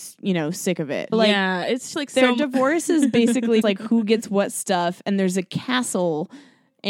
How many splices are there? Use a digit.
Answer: 3